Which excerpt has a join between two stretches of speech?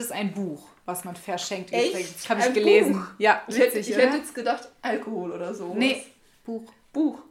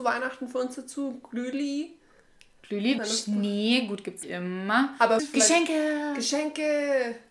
second; 3 cuts; at 3.0 s, 4.2 s, 5.2 s

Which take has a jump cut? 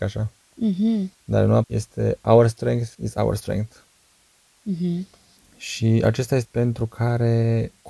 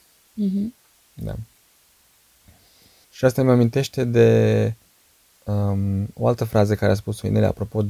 first; 5 cuts; at 1.1 s, 1.6 s, 2.9 s, 5.4 s, 6.4 s

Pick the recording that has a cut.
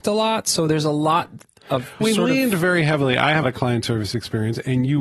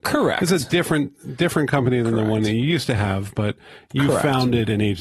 first; 2 cuts; at 2.0 s, 3.4 s

